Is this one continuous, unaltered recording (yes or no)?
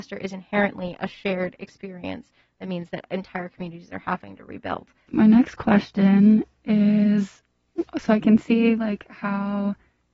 yes